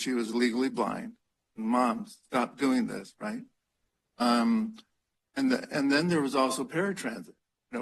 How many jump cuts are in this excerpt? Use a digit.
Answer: 0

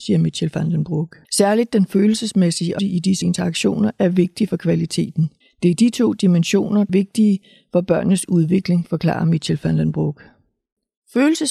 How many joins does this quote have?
5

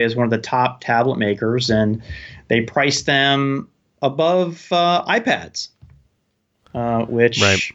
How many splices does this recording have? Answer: 0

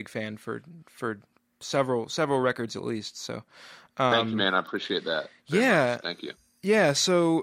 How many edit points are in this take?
0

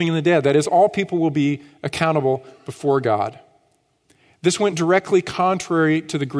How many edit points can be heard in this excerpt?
0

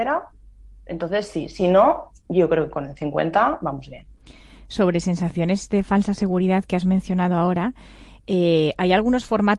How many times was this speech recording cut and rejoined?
0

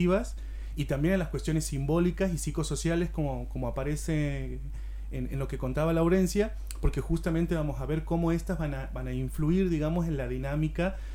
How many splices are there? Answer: 0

